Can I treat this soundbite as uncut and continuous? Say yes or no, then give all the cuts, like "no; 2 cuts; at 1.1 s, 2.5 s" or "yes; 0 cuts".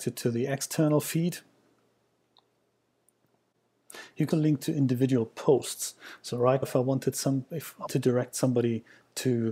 no; 3 cuts; at 4.3 s, 6.6 s, 7.9 s